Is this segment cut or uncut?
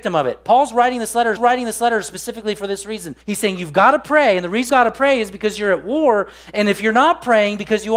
cut